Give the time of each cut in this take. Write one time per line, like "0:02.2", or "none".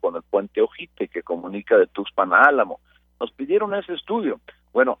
none